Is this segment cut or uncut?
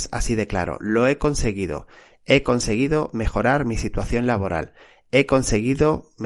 uncut